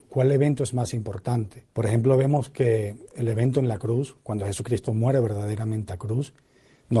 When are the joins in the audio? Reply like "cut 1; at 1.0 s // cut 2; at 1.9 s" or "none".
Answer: cut 1; at 1.7 s // cut 2; at 5.9 s